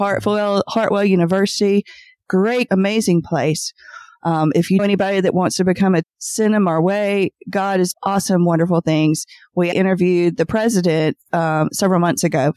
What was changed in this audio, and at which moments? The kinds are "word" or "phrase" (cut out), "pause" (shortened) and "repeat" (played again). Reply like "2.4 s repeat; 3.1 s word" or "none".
2.7 s phrase; 4.8 s word; 6.0 s word; 7.9 s word; 9.7 s word